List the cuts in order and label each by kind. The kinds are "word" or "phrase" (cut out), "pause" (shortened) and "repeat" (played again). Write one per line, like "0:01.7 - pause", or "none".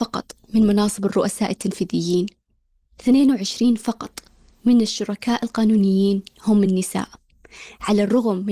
none